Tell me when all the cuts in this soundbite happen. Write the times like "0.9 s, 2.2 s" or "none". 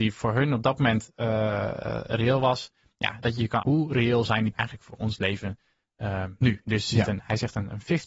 3.6 s, 4.5 s